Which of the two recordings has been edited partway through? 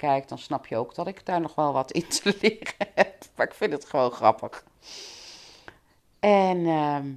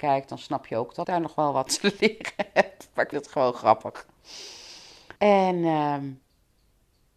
second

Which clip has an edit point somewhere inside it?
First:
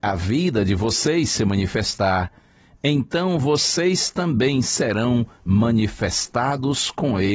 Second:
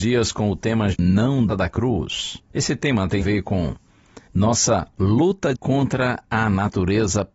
second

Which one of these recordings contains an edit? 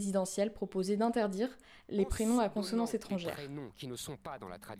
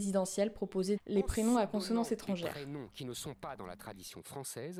second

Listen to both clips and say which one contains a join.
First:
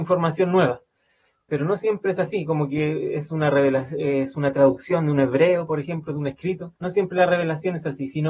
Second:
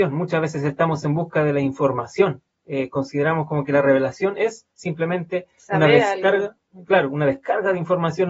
first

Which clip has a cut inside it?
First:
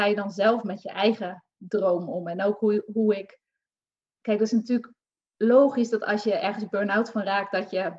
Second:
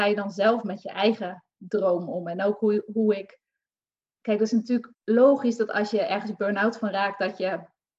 second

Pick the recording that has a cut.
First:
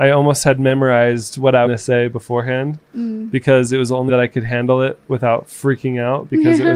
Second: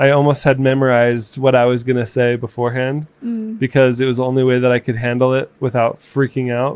first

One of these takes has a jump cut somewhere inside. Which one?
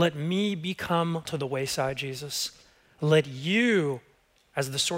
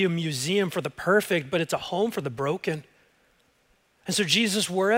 first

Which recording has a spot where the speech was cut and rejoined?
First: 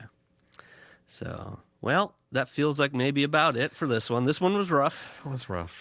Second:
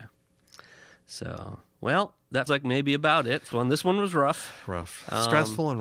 second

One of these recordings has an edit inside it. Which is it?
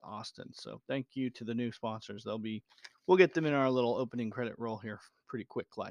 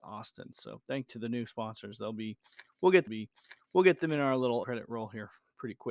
second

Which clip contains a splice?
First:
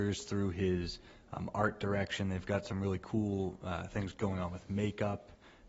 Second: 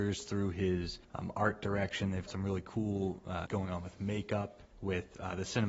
second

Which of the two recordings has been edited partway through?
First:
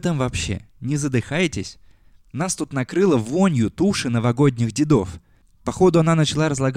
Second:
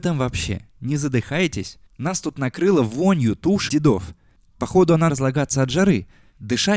second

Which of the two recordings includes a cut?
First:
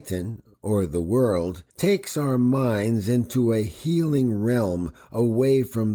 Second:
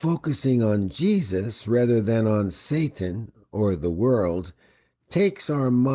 first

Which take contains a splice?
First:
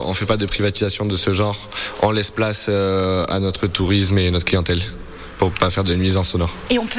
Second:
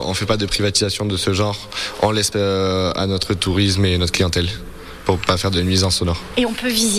second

